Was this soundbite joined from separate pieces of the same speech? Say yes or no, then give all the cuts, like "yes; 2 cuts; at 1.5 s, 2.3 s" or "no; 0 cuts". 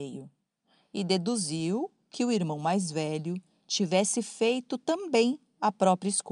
no; 0 cuts